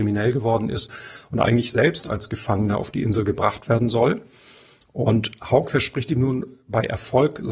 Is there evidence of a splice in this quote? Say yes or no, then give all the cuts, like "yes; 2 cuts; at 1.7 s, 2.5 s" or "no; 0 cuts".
no; 0 cuts